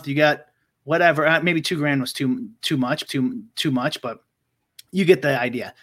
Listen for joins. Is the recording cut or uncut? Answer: cut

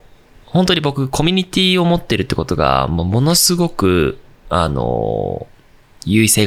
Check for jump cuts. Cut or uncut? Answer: uncut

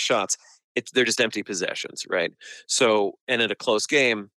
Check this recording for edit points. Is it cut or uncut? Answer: uncut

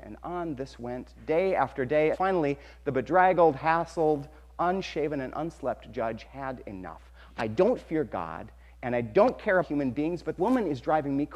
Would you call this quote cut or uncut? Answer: cut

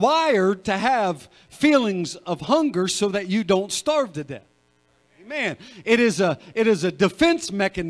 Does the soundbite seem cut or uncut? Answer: uncut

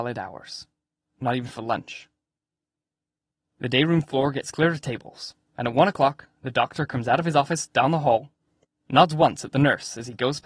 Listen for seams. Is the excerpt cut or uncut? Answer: uncut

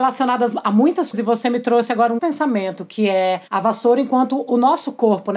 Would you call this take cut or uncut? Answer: cut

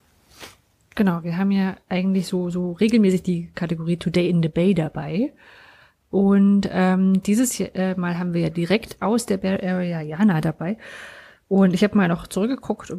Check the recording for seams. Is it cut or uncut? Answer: uncut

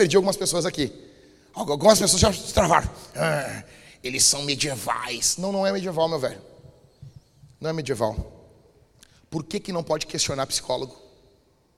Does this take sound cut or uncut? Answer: uncut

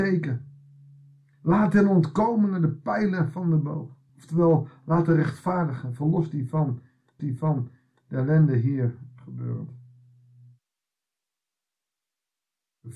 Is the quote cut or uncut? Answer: cut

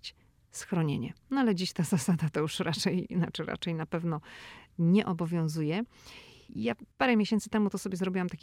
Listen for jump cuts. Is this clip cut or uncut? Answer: cut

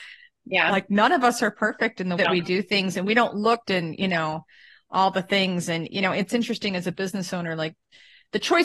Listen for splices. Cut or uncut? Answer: cut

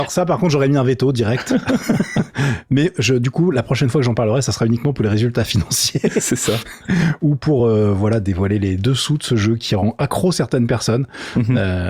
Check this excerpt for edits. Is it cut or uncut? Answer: uncut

